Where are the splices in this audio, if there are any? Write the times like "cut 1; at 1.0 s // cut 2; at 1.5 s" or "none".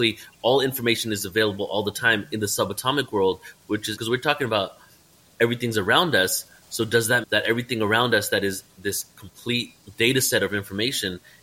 cut 1; at 4.0 s // cut 2; at 7.2 s

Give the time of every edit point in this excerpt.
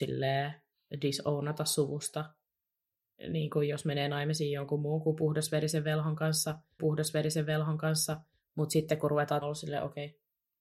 cut 1; at 6.8 s // cut 2; at 9.4 s

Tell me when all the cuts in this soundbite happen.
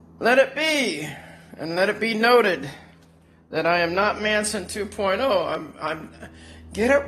none

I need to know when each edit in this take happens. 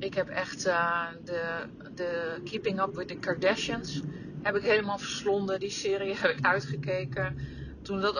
none

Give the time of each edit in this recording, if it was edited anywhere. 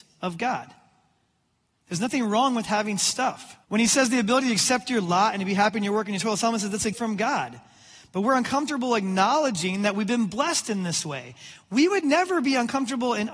cut 1; at 3.6 s // cut 2; at 6.9 s

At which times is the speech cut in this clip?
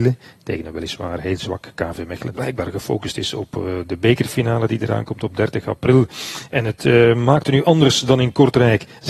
cut 1; at 2.3 s

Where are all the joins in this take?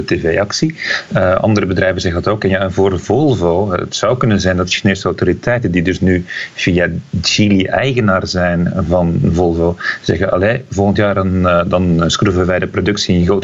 none

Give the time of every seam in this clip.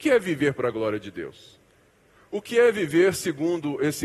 none

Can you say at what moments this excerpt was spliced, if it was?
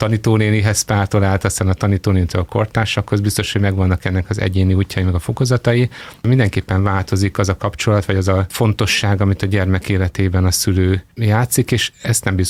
cut 1; at 11.1 s

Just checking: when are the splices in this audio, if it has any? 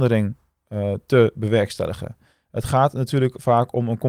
none

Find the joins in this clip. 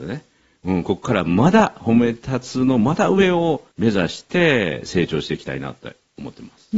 cut 1; at 3.7 s

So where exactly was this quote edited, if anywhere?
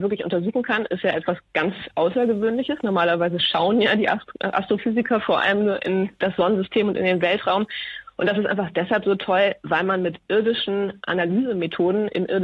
none

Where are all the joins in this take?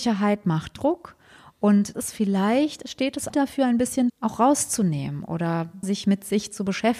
cut 1; at 1.9 s // cut 2; at 3.3 s // cut 3; at 4.1 s // cut 4; at 5.8 s

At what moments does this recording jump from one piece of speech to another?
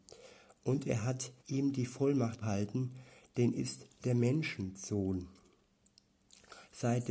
cut 1; at 1.4 s // cut 2; at 2.4 s // cut 3; at 3.5 s

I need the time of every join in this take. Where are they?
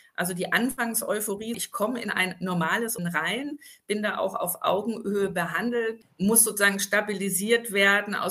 cut 1; at 1.5 s // cut 2; at 3.0 s

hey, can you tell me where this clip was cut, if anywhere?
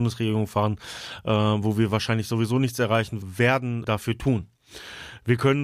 cut 1; at 3.2 s // cut 2; at 3.8 s

